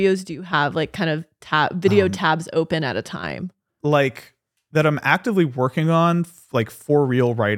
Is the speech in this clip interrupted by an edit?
no; 0 cuts

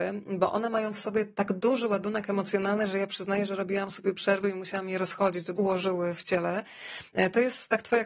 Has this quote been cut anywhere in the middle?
yes; 2 cuts; at 5.6 s, 6.2 s

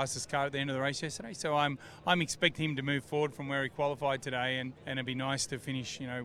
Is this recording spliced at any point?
yes; 1 cut; at 4.8 s

